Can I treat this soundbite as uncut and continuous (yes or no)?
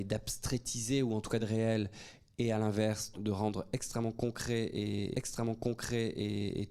no